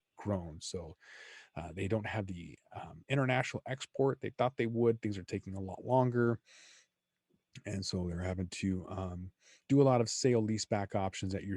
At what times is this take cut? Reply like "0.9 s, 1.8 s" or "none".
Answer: none